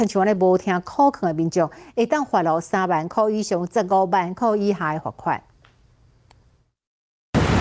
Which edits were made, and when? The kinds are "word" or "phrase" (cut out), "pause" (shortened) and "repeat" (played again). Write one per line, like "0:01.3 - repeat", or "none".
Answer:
none